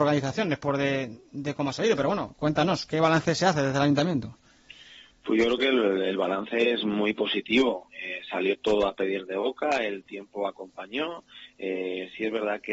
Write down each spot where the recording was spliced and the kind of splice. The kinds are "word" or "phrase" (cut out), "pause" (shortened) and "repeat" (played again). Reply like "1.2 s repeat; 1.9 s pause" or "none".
none